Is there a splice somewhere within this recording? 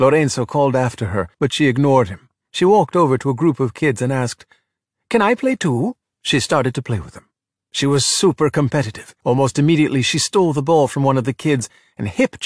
yes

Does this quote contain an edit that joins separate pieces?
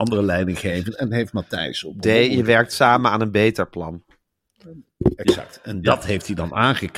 no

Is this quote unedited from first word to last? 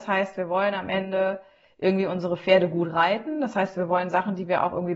yes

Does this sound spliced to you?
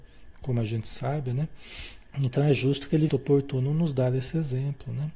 yes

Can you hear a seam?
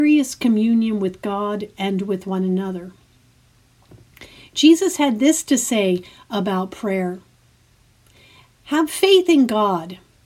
no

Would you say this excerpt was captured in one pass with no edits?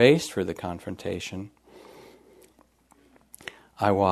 yes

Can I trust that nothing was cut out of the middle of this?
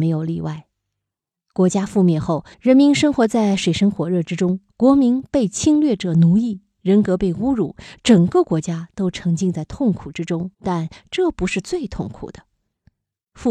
no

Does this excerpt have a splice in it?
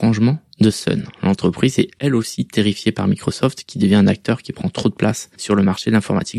no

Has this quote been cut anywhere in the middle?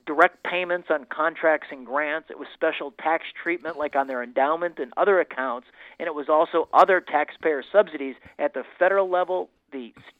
no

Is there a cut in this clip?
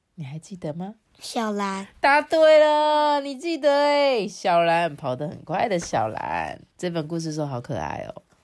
yes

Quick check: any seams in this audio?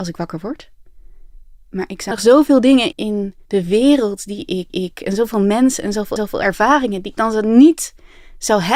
yes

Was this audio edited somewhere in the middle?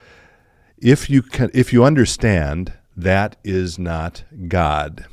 no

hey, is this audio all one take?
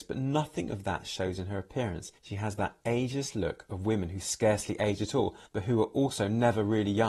no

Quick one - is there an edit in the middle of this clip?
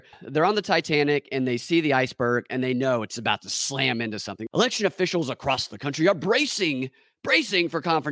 no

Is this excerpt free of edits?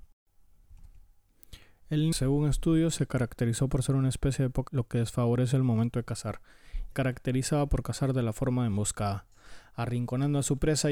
no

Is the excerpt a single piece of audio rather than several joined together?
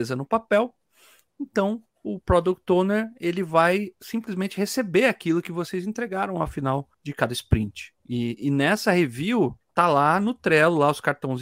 no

